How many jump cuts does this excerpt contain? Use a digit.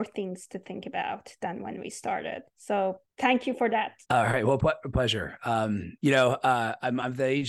2